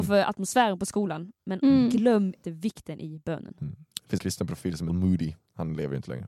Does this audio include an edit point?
yes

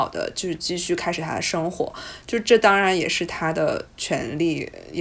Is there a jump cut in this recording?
yes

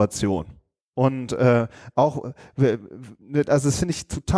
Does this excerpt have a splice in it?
no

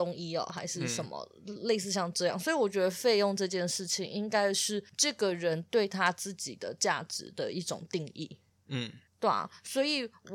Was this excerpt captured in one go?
no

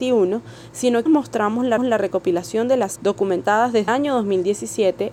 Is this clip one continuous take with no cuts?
no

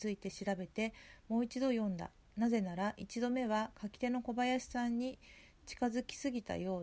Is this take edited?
no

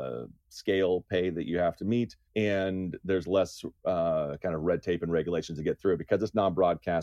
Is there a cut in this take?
yes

